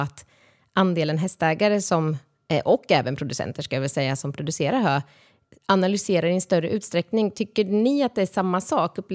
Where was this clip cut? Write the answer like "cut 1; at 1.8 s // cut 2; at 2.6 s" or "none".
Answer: none